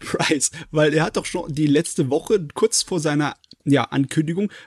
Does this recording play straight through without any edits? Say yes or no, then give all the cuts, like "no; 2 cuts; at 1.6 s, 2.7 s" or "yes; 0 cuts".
yes; 0 cuts